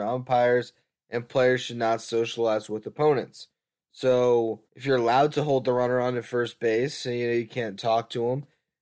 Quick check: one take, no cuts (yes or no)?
no